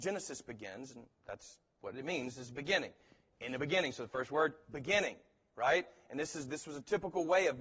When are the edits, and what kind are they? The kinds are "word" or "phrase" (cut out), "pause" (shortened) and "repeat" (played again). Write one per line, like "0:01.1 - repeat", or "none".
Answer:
none